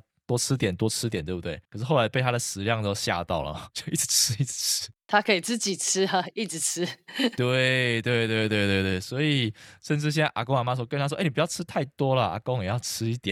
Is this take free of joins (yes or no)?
no